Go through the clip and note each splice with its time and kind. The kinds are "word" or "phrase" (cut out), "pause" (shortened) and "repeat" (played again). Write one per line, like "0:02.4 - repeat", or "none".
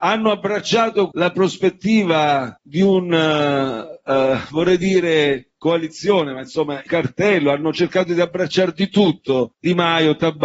0:01.1 - word
0:06.9 - phrase